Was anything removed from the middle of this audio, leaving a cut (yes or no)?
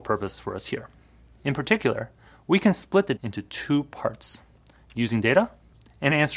yes